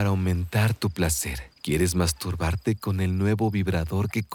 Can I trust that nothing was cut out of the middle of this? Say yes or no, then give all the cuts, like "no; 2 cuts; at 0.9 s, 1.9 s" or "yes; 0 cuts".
no; 1 cut; at 1.5 s